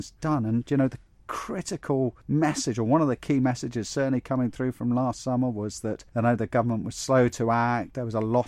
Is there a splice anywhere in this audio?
yes; 2 cuts; at 2.2 s, 6.1 s

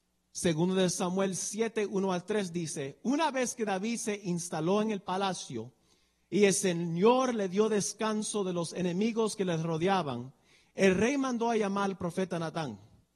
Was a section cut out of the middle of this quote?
no; 0 cuts

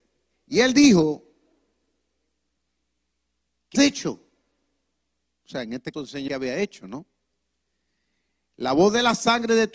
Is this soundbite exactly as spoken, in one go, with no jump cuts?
no; 3 cuts; at 3.7 s, 5.9 s, 6.3 s

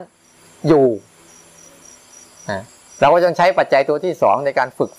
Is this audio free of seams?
yes; 0 cuts

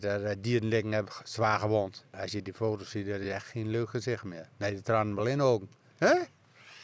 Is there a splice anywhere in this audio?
no; 0 cuts

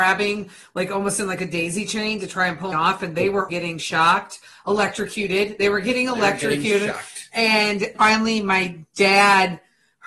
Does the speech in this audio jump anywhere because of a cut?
yes; 3 cuts; at 2.7 s, 3.5 s, 7.9 s

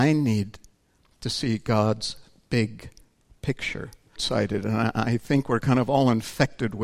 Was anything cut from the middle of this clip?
yes; 1 cut; at 4.2 s

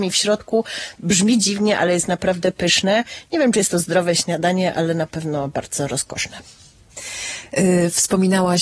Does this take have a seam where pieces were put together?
no; 0 cuts

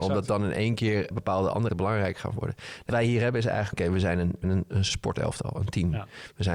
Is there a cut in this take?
yes; 6 cuts; at 1.1 s, 1.7 s, 2.9 s, 3.7 s, 4.4 s, 4.9 s

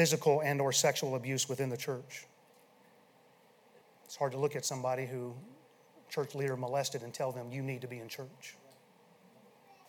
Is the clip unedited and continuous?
yes; 0 cuts

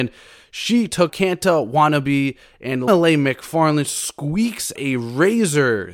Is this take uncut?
no; 3 cuts; at 1.1 s, 2.9 s, 4.8 s

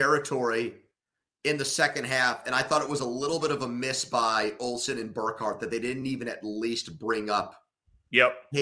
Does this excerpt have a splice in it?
no; 0 cuts

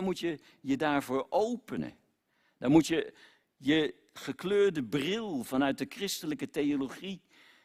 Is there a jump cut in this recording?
no; 0 cuts

